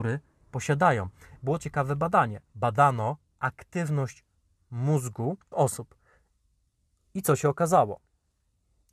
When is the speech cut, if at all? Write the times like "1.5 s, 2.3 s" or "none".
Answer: 1.6 s, 2.5 s, 5.5 s

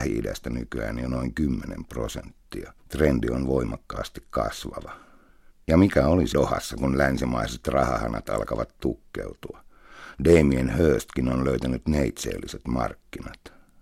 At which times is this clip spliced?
2.8 s, 5.5 s, 6.3 s

